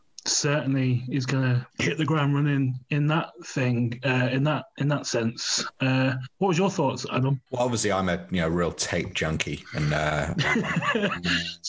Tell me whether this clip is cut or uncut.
cut